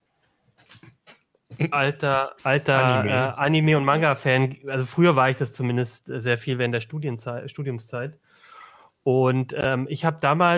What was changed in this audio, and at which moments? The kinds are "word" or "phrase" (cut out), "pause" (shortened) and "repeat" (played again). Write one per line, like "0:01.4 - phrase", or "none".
0:02.4 - pause

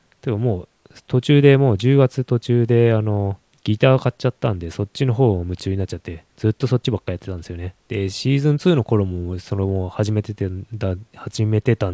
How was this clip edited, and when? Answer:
0:03.5 - pause
0:06.3 - pause
0:07.8 - pause

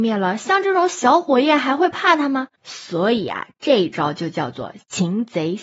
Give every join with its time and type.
0:02.5 - pause

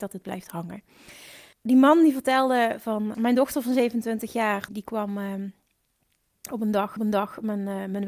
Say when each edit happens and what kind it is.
0:01.5 - pause
0:03.1 - word
0:04.7 - word
0:07.0 - repeat

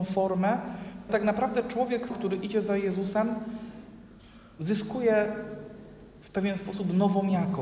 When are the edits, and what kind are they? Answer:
0:01.1 - word
0:02.1 - word

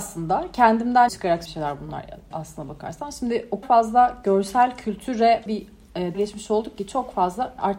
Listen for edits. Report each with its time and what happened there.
0:01.1 - word
0:01.5 - word
0:02.3 - word
0:03.6 - word
0:05.5 - word
0:06.1 - word

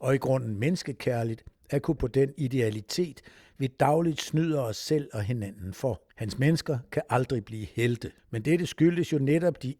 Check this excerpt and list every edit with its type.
0:02.0 - word
0:06.1 - pause
0:08.2 - pause

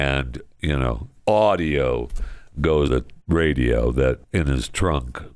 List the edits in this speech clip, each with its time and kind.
0:01.2 - word
0:02.9 - word
0:03.2 - pause
0:04.2 - word

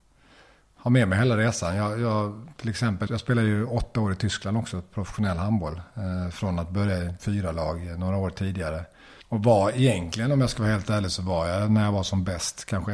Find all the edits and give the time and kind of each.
0:03.1 - word
0:07.2 - word
0:09.2 - pause

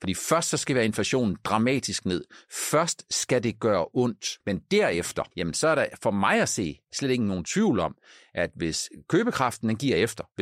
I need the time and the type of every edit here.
0:04.4 - pause
0:05.3 - pause

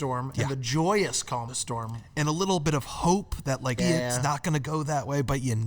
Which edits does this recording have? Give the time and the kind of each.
0:01.5 - word
0:03.8 - word

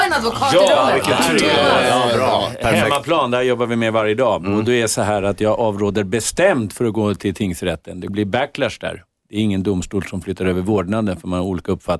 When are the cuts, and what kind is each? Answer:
0:08.1 - word

